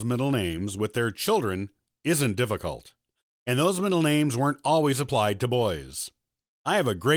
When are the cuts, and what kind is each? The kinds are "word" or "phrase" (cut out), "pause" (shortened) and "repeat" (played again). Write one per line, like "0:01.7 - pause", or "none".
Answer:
none